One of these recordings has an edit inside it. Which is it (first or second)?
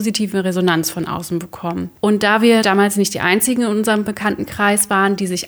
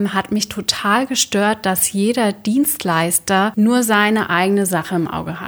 first